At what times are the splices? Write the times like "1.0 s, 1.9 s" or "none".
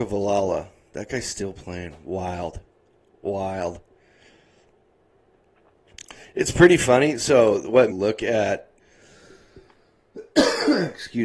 7.9 s, 8.8 s